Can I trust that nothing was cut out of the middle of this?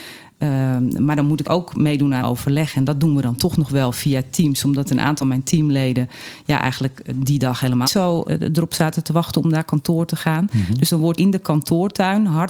no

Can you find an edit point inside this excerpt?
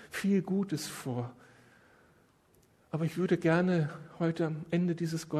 no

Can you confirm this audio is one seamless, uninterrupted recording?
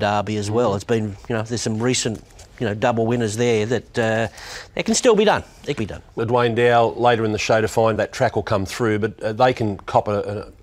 no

